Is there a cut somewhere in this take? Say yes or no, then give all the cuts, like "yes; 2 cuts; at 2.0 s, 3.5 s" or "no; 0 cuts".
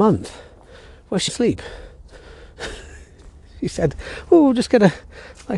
yes; 1 cut; at 1.3 s